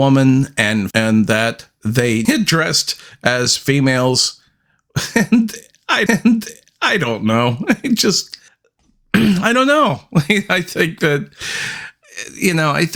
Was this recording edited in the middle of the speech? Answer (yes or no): yes